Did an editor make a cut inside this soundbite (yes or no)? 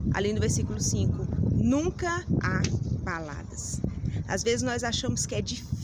yes